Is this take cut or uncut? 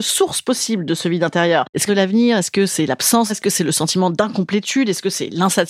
cut